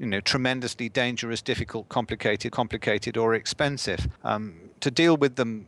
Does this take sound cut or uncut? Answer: cut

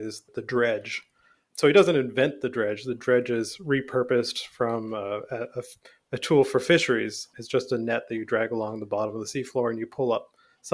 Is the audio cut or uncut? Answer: uncut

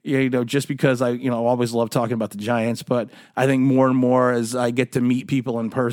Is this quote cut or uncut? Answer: uncut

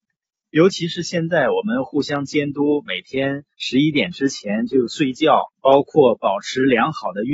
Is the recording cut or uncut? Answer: cut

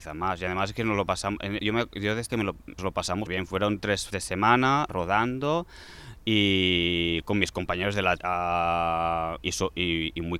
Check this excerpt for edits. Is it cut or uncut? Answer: cut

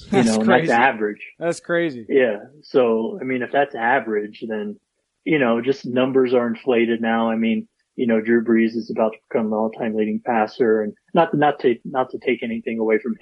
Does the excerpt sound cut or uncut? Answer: uncut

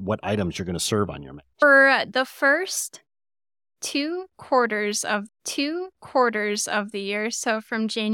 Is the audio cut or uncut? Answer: cut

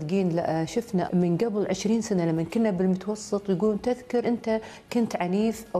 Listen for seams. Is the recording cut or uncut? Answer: cut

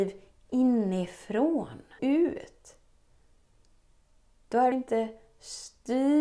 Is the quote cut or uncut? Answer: cut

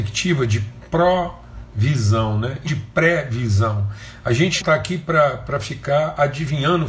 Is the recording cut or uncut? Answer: cut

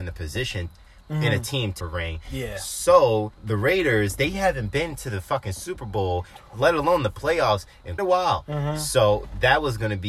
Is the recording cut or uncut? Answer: cut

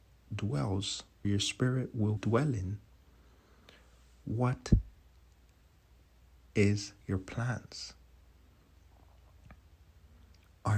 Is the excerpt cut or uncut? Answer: cut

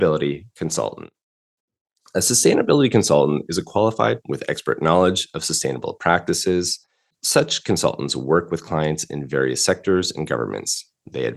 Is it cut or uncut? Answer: cut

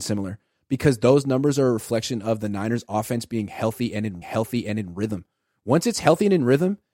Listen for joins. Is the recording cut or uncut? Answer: cut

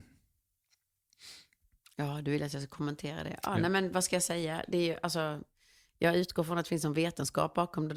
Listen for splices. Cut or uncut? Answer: uncut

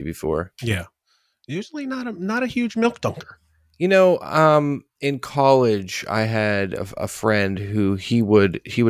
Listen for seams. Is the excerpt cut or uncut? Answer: uncut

